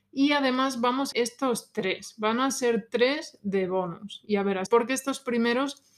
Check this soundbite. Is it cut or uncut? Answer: cut